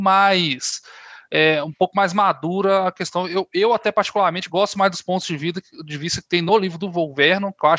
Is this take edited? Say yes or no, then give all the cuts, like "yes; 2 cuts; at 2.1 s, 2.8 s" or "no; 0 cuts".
no; 0 cuts